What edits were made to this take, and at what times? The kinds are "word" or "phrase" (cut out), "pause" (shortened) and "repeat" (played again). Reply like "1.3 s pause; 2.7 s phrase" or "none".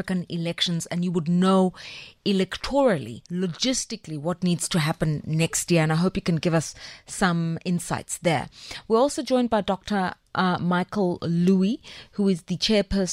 3.3 s pause